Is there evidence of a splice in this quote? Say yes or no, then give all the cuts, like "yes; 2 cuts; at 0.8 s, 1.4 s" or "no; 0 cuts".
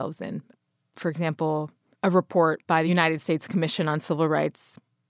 no; 0 cuts